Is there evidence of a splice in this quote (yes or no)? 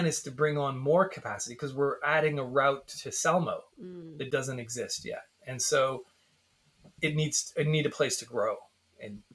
no